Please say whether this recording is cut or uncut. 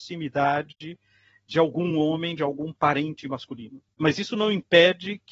uncut